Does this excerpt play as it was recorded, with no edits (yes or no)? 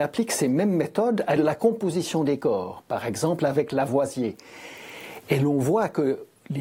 no